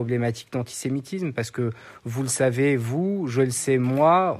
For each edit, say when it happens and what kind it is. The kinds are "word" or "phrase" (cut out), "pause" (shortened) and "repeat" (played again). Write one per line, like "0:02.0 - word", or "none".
none